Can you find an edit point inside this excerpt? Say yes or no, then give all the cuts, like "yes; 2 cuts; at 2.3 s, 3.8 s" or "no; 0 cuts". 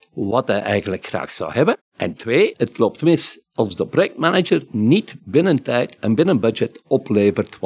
no; 0 cuts